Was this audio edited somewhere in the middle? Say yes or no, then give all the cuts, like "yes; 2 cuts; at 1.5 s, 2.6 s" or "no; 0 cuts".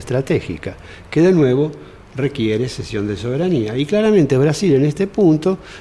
no; 0 cuts